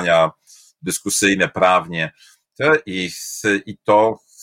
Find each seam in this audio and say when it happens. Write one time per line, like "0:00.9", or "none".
none